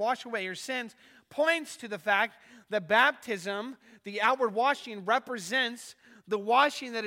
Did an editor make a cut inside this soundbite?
no; 0 cuts

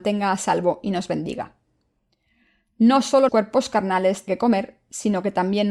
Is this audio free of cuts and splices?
no; 2 cuts; at 3.3 s, 4.3 s

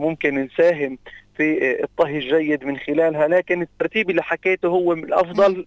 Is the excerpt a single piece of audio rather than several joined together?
yes; 0 cuts

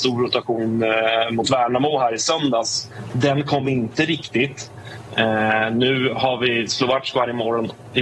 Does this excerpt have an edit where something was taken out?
no; 0 cuts

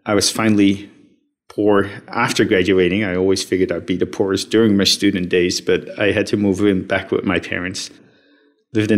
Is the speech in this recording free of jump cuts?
yes; 0 cuts

